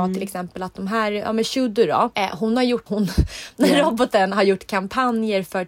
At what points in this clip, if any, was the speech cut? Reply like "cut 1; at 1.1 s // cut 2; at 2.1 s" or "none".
cut 1; at 2.1 s // cut 2; at 2.9 s